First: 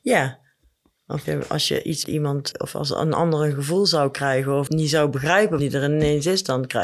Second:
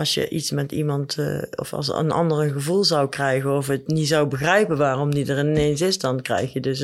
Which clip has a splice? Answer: first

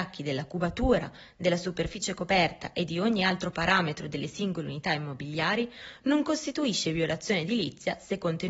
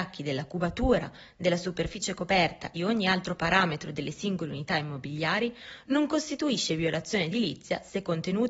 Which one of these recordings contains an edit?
second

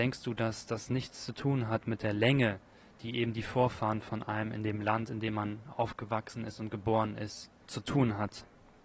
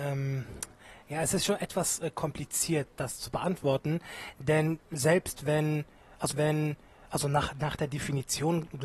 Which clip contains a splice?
second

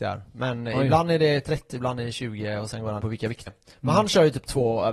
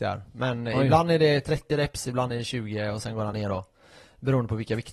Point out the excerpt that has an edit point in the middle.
first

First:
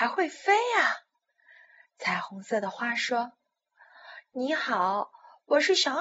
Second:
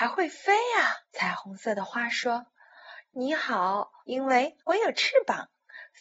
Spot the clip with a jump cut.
second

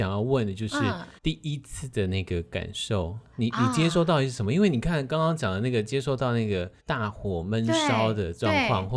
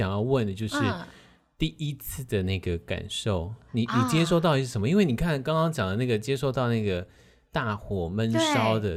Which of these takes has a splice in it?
first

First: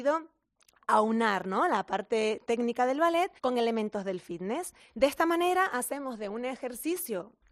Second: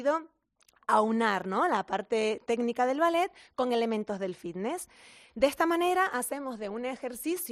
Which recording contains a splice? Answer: first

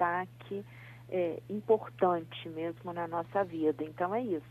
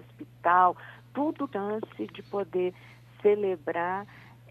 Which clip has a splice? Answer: second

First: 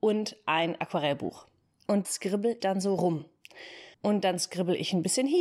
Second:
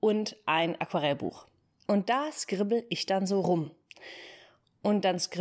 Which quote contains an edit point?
first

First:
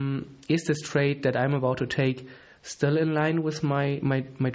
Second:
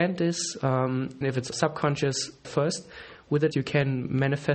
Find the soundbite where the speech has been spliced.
second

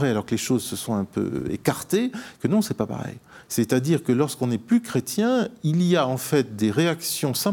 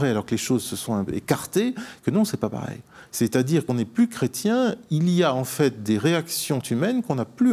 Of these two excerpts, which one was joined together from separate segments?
second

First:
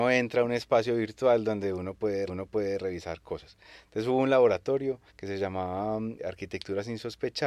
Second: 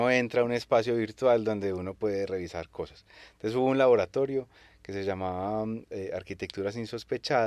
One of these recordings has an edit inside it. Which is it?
first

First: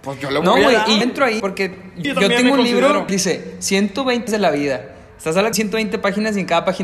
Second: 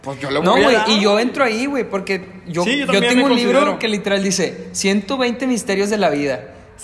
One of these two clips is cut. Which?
first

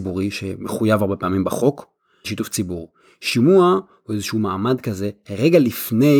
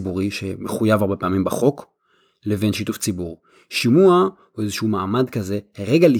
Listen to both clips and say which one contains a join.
first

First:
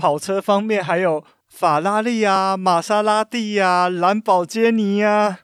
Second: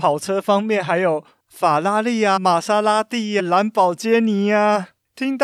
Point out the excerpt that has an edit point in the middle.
second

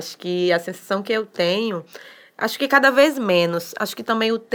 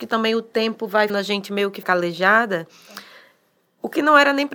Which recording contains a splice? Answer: second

